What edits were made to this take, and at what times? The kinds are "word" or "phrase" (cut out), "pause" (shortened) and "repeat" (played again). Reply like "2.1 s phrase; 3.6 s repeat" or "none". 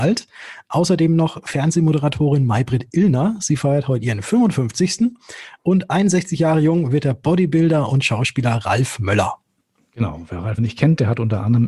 10.6 s word